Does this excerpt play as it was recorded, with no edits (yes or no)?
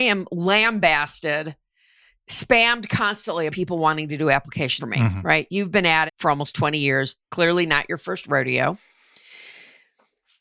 no